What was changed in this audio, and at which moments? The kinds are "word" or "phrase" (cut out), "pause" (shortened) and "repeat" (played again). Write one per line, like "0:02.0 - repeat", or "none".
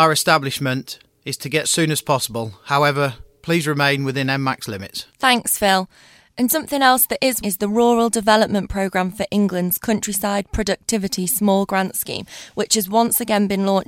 0:01.6 - phrase
0:05.1 - pause
0:06.5 - word
0:07.4 - phrase